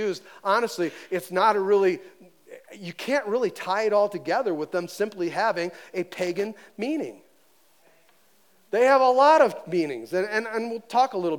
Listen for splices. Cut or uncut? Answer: uncut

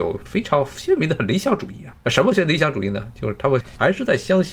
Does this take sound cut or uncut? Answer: cut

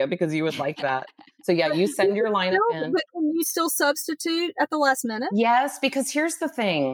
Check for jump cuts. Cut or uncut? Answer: uncut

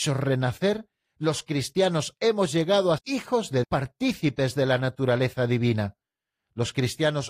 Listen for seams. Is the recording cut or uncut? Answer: cut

